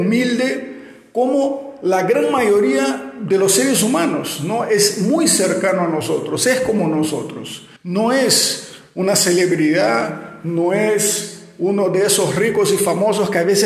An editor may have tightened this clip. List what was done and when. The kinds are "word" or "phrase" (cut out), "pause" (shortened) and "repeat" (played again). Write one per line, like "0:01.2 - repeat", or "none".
0:07.8 - pause